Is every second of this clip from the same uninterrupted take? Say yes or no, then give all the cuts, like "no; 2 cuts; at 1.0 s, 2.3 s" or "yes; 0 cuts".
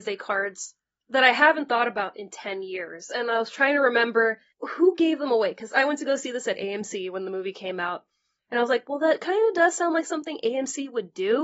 yes; 0 cuts